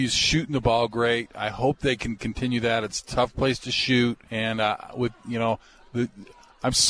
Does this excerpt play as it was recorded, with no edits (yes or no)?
no